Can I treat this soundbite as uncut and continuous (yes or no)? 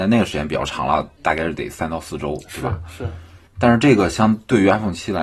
no